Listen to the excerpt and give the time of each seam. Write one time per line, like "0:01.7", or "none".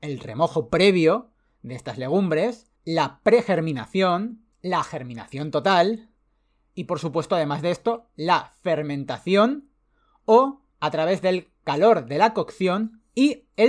0:02.8
0:04.5
0:10.7